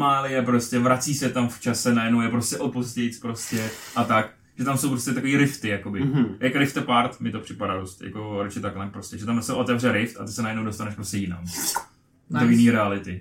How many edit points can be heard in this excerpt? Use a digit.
2